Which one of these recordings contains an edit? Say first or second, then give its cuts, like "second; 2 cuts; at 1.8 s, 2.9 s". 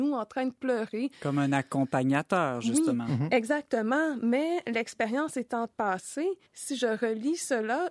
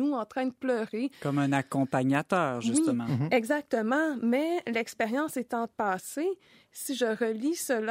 first; 1 cut; at 6.5 s